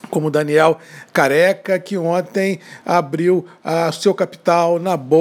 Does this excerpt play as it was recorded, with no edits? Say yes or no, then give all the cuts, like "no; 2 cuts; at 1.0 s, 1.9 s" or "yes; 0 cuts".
yes; 0 cuts